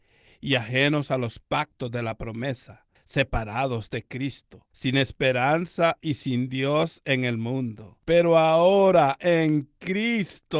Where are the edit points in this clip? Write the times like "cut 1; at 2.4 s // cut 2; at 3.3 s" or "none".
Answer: cut 1; at 2.9 s // cut 2; at 4.7 s // cut 3; at 8.0 s